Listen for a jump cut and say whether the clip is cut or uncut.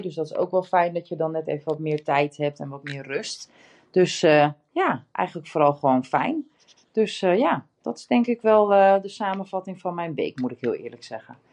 uncut